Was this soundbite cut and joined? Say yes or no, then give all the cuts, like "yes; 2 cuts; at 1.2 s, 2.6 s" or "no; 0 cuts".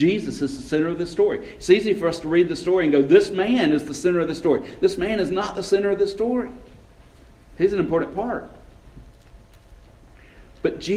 no; 0 cuts